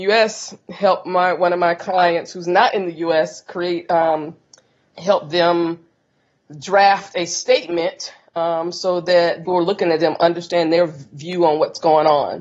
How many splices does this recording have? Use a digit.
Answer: 1